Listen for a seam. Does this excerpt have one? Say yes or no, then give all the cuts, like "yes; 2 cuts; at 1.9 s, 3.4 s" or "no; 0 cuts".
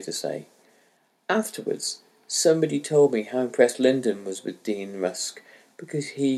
no; 0 cuts